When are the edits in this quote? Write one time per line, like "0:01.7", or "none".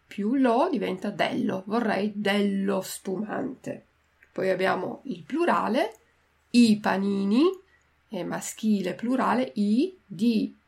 none